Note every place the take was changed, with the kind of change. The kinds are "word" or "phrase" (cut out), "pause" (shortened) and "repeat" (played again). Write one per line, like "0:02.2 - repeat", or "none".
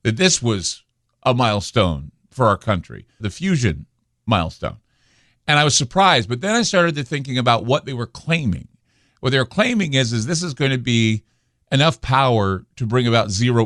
0:03.2 - phrase

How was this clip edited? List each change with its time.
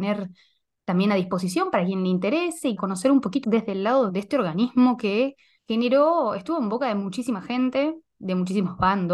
0:02.8 - word
0:03.4 - word
0:04.1 - phrase
0:05.6 - pause

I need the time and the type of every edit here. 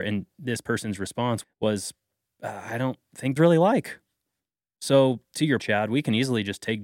0:01.4 - word
0:03.4 - phrase
0:05.2 - pause
0:05.6 - word

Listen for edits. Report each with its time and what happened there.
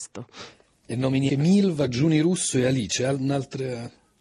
0:01.3 - word

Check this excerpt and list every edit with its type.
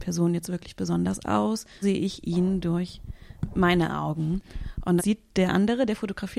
0:01.8 - word
0:05.0 - word

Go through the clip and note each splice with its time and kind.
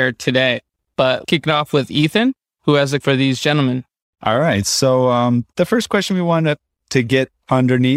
0:01.2 - word
0:03.0 - word

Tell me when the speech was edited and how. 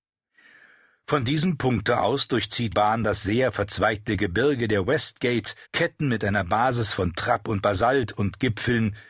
0:02.7 - word
0:05.6 - pause

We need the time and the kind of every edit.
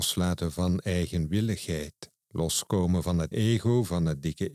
0:02.2 - pause
0:03.3 - word

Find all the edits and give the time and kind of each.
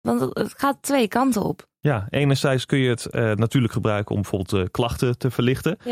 none

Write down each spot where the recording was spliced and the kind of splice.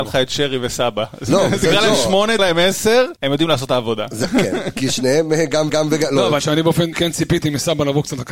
0:02.4 - word
0:03.2 - pause
0:05.7 - repeat
0:06.4 - phrase
0:06.9 - word

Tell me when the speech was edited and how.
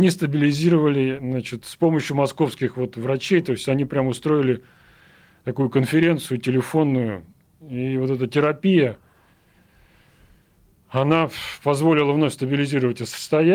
none

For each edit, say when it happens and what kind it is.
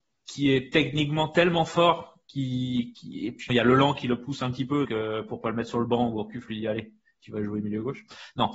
0:03.5 - word
0:04.8 - word

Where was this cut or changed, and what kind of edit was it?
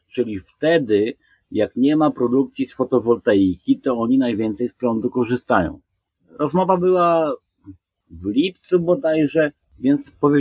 none

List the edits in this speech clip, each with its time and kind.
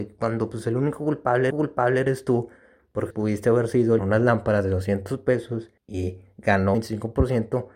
0:01.5 - repeat
0:03.1 - word
0:04.0 - phrase
0:05.8 - pause
0:06.7 - phrase

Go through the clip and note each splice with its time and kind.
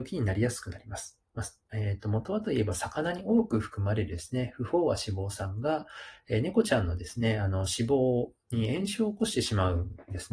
0:01.3 - pause

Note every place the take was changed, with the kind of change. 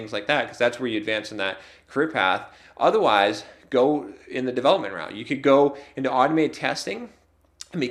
none

